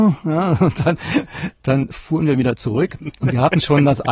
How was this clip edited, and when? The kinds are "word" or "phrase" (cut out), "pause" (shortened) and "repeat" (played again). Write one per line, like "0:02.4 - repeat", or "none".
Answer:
none